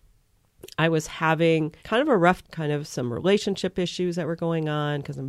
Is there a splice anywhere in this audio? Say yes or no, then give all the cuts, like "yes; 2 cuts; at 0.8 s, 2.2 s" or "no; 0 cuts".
yes; 2 cuts; at 1.8 s, 2.4 s